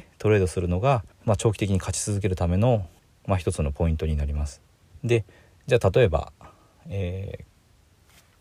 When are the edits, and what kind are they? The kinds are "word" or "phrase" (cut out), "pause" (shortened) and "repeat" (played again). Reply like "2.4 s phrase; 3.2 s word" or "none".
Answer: 1.1 s pause; 3.0 s pause; 5.0 s pause